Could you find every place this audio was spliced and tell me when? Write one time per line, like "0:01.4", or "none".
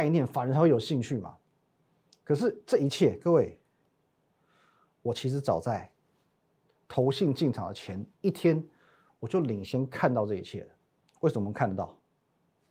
0:08.1
0:10.9